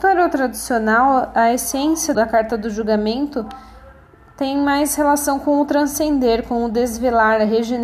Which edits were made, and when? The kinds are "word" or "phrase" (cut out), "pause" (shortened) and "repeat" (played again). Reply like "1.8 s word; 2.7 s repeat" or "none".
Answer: 2.1 s word